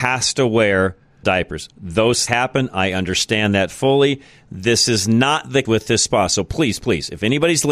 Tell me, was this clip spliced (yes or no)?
yes